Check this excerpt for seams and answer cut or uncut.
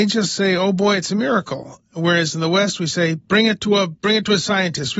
uncut